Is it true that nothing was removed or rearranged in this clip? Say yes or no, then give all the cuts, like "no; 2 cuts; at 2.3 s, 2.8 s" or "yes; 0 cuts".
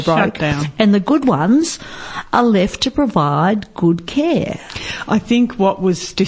yes; 0 cuts